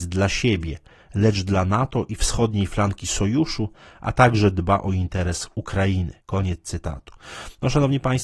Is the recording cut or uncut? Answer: cut